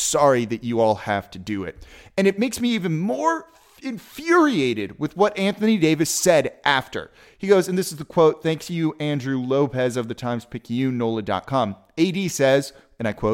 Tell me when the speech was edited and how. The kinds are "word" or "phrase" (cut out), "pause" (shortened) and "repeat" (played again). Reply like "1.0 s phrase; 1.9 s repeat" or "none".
none